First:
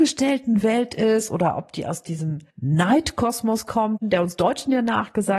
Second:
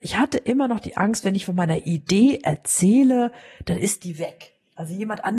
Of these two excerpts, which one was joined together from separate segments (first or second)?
first